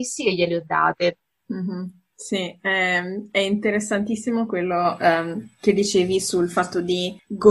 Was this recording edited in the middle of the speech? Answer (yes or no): no